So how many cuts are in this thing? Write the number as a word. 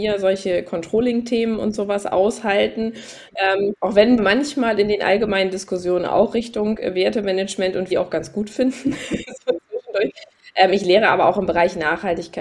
three